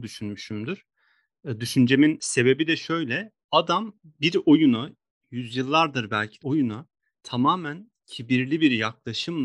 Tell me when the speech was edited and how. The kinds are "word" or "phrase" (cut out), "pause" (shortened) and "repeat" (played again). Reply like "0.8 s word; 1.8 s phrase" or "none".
6.4 s phrase